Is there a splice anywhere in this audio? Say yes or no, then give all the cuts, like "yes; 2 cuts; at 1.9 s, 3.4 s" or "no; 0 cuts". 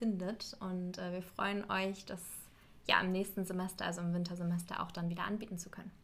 no; 0 cuts